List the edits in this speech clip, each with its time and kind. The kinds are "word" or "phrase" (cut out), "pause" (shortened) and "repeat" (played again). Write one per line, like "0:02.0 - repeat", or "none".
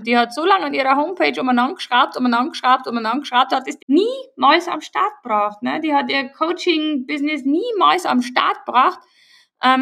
0:03.8 - word